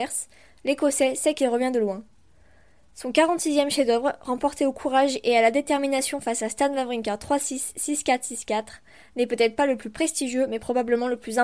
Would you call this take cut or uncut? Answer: uncut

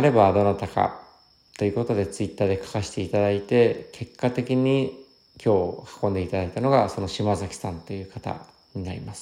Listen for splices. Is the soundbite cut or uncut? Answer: uncut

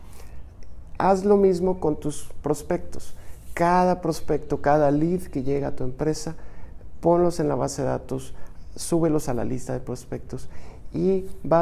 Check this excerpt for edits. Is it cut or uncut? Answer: uncut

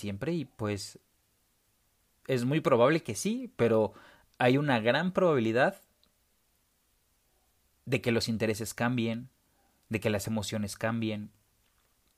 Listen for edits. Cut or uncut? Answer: uncut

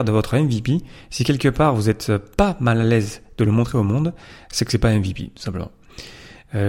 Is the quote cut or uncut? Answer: uncut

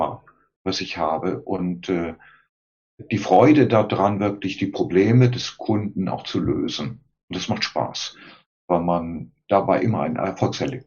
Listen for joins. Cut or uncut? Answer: uncut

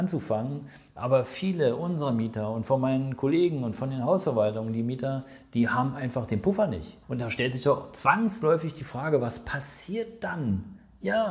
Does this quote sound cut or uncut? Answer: cut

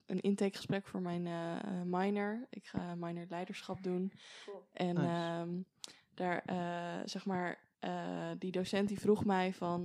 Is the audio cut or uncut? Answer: cut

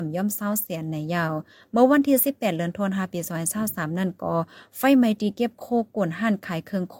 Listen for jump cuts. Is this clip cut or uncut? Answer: uncut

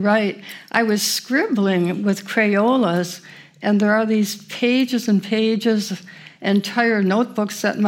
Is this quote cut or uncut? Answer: uncut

